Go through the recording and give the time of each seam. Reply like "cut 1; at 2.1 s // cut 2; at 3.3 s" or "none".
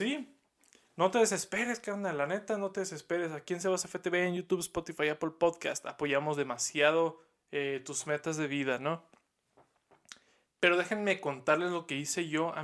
none